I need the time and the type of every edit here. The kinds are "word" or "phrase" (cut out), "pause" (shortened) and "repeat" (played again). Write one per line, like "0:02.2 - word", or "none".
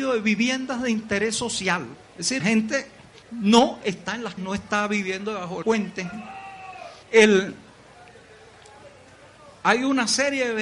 0:02.0 - pause
0:02.4 - word
0:03.2 - pause
0:04.4 - word
0:05.6 - word
0:07.0 - pause